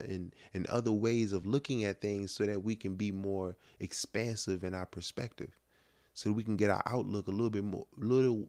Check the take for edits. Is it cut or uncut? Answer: uncut